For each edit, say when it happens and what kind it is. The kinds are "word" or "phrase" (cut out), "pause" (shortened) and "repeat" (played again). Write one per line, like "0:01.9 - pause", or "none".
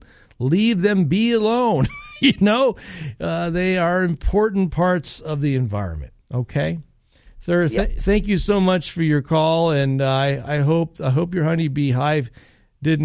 0:06.2 - pause